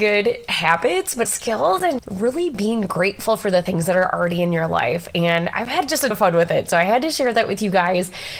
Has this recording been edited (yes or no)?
yes